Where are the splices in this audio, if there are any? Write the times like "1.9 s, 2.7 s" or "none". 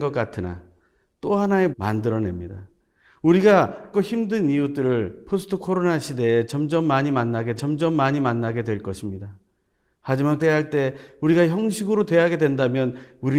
1.7 s, 3.9 s, 7.6 s, 10.4 s